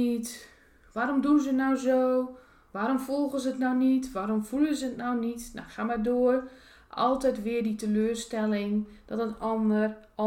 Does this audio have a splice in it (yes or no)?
no